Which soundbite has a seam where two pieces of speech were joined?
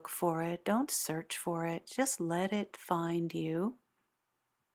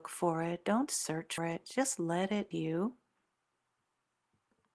second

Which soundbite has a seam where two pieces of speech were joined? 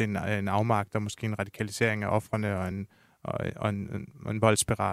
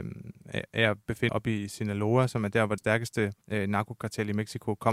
second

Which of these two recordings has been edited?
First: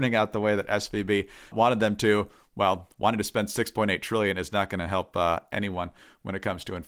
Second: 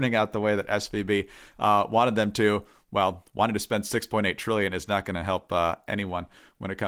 first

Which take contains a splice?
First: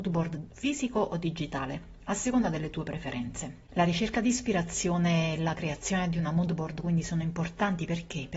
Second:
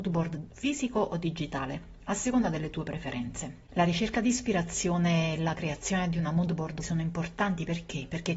second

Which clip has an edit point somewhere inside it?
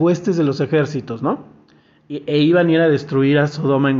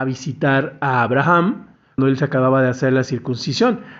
second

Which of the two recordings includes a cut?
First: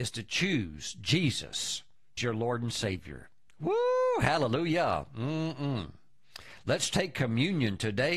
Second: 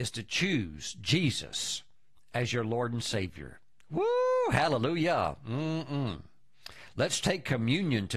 first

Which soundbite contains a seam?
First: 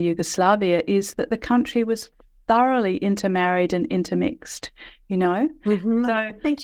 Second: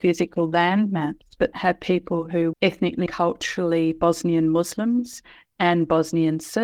second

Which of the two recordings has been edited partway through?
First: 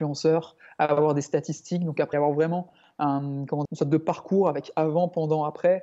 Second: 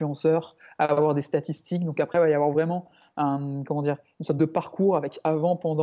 first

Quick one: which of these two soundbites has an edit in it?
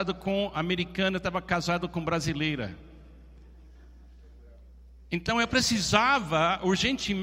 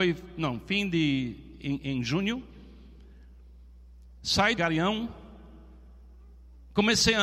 second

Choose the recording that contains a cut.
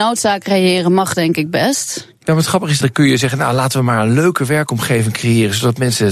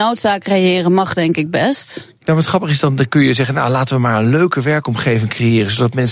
first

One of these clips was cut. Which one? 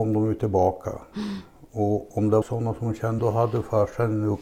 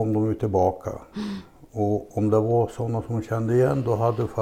first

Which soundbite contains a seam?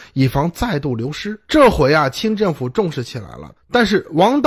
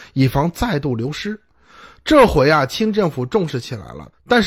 first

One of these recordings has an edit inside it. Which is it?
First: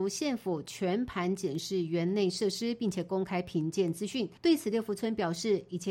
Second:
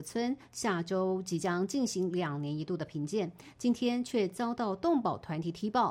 first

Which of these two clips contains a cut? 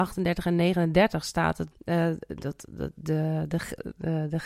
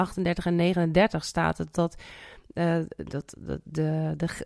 first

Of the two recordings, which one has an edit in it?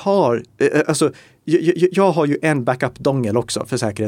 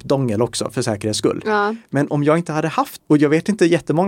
second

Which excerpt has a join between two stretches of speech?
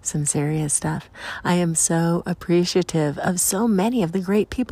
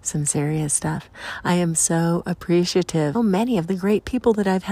second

